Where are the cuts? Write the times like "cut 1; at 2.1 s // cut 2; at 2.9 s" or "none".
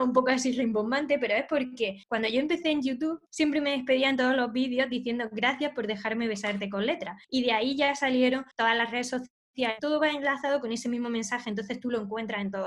cut 1; at 2.0 s // cut 2; at 3.3 s // cut 3; at 7.2 s // cut 4; at 8.5 s